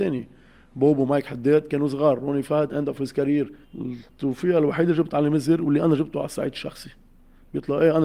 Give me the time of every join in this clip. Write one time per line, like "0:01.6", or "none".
0:02.7
0:03.6